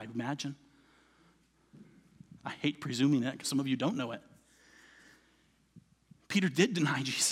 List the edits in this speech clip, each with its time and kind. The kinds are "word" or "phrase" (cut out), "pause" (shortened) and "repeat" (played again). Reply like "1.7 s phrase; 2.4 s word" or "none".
3.4 s phrase